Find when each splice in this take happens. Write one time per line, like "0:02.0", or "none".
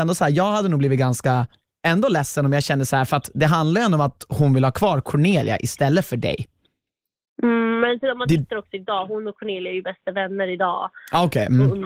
none

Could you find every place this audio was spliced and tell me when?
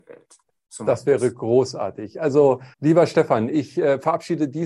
0:02.7

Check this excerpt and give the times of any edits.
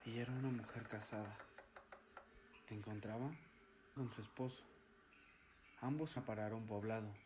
0:02.7
0:04.0
0:06.2

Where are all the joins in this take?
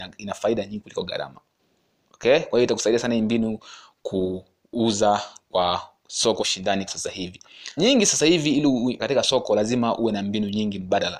0:06.4
0:06.9
0:07.8
0:09.0

